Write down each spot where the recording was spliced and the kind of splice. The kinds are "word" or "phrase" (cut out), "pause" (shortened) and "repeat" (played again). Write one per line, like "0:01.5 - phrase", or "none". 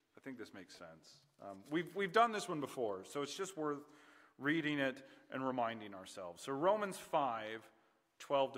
none